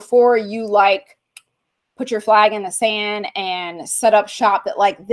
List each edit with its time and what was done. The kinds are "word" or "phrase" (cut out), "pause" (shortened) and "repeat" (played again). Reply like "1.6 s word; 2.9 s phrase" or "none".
none